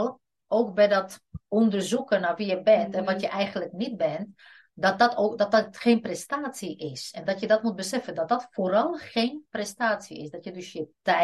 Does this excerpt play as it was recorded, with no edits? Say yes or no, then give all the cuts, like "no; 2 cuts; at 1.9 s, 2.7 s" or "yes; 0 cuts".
yes; 0 cuts